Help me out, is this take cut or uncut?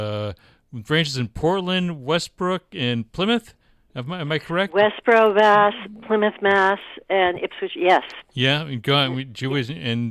uncut